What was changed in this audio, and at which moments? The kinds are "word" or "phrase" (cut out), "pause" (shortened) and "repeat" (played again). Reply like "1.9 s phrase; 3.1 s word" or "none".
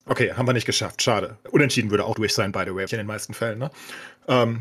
2.1 s word; 2.9 s word